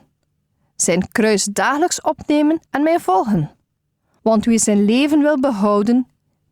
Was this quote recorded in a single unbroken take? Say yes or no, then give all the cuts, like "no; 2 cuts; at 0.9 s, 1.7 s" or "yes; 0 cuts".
no; 1 cut; at 2.7 s